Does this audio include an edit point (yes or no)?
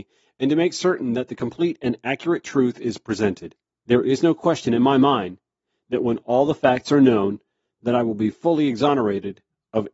no